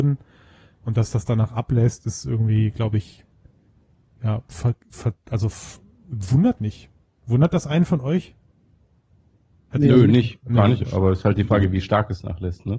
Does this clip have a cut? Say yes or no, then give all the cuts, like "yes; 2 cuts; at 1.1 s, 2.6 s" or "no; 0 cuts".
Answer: yes; 1 cut; at 6.6 s